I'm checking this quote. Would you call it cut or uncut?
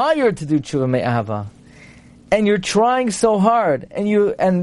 uncut